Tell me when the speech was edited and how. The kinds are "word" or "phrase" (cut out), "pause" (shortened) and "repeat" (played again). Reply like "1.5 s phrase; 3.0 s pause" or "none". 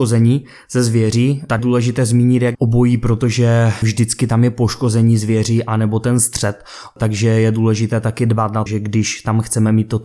1.6 s word; 2.5 s word; 3.8 s word; 8.7 s word